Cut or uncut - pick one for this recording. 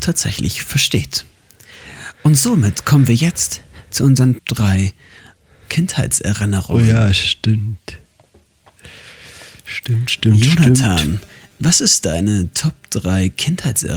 cut